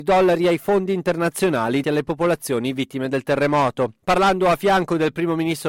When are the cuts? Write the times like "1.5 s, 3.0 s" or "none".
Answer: 1.8 s, 4.0 s